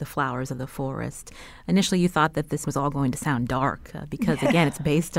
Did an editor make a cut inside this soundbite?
yes; 1 cut; at 2.6 s

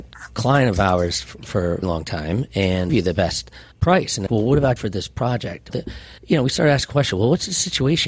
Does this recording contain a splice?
yes; 7 cuts; at 1.8 s, 2.9 s, 3.7 s, 4.3 s, 4.8 s, 5.7 s, 6.2 s

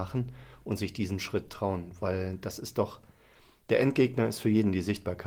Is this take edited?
no; 0 cuts

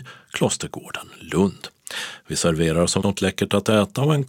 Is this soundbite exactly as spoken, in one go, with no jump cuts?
no; 1 cut; at 3.0 s

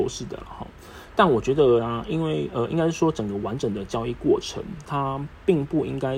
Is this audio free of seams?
no; 1 cut; at 4.8 s

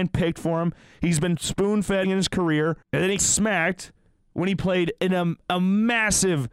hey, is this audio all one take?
no; 3 cuts; at 2.0 s, 2.8 s, 3.2 s

